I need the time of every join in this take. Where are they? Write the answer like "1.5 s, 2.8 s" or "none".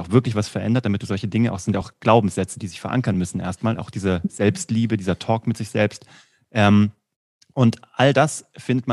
none